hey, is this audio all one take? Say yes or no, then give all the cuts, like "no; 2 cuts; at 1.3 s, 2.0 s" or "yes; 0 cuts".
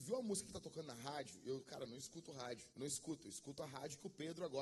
no; 1 cut; at 2.7 s